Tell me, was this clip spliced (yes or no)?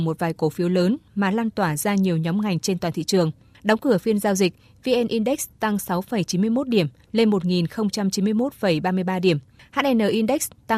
no